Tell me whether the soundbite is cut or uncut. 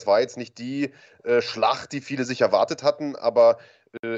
uncut